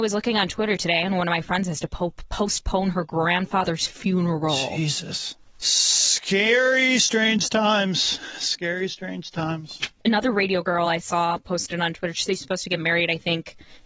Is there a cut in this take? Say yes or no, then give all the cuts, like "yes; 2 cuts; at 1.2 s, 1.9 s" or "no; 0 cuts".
no; 0 cuts